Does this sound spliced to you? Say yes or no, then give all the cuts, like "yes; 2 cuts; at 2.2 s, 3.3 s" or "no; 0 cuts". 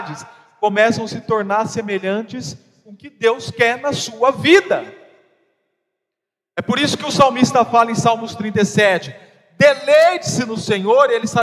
no; 0 cuts